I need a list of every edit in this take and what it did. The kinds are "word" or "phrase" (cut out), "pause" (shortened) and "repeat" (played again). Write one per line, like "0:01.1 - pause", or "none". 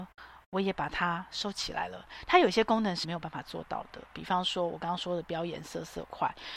0:03.0 - word